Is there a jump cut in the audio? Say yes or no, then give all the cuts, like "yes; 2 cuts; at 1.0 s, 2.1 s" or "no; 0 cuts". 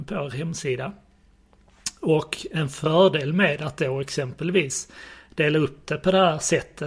no; 0 cuts